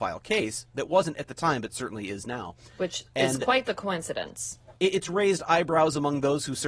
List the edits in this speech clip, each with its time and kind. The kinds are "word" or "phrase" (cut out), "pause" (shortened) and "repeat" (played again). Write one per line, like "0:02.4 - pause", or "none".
0:04.8 - pause